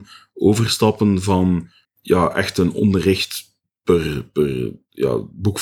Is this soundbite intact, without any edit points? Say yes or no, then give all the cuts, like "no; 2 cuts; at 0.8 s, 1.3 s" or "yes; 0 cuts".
yes; 0 cuts